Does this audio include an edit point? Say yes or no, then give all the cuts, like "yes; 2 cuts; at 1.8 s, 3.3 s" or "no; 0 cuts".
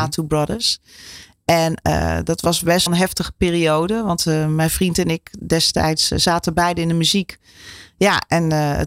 yes; 1 cut; at 2.9 s